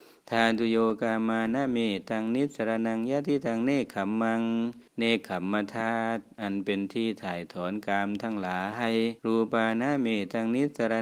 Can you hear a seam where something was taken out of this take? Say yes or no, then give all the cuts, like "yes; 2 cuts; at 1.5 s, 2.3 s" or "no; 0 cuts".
yes; 2 cuts; at 4.9 s, 9.2 s